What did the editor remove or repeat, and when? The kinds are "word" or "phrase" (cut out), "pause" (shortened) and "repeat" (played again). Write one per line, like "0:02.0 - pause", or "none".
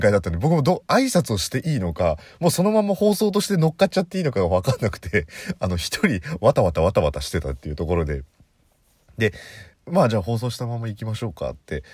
0:09.7 - pause